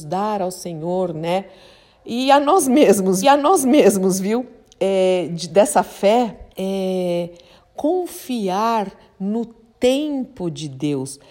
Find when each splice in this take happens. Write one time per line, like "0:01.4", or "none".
0:03.2
0:06.5